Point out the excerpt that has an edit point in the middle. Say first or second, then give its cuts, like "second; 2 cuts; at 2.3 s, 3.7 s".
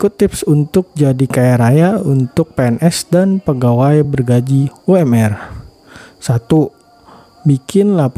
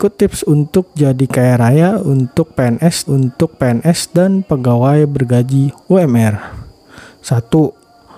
second; 1 cut; at 3.1 s